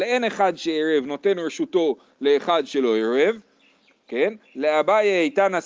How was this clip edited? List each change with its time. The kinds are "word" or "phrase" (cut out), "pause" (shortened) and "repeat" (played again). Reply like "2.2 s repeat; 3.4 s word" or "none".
none